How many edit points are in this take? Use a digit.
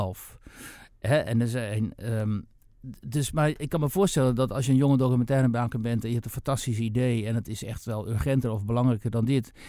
0